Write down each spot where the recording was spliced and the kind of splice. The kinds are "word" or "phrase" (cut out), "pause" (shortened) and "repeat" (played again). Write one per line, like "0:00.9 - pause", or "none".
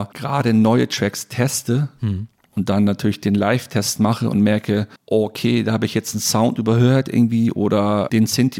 0:05.0 - pause